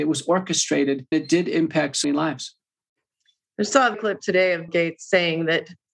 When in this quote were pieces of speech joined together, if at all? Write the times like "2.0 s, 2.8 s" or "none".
1.1 s, 2.0 s, 3.9 s, 4.7 s